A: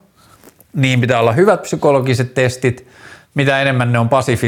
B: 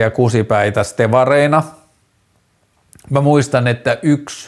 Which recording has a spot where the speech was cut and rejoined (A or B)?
A